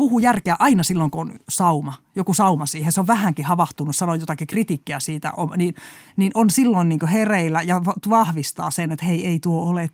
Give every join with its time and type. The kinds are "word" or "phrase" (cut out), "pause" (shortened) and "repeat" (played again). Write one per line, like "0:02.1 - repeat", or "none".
none